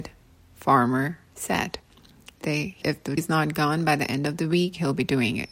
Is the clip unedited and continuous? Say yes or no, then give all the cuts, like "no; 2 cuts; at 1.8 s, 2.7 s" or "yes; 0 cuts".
no; 3 cuts; at 2.4 s, 2.8 s, 3.2 s